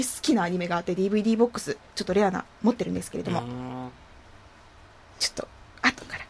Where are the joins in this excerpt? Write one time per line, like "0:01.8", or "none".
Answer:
none